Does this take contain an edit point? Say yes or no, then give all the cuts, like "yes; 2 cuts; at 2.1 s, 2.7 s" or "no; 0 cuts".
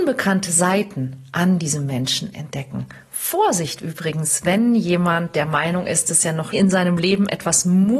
yes; 1 cut; at 6.5 s